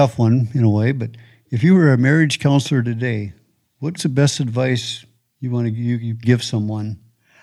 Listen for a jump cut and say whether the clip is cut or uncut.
cut